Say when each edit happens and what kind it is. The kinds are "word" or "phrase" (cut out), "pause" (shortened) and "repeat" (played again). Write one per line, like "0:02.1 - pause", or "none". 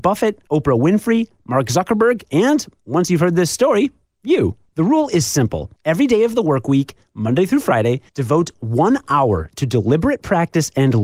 0:04.7 - pause
0:05.8 - pause
0:08.1 - pause